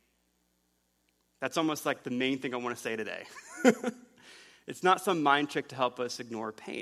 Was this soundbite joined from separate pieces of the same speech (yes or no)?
no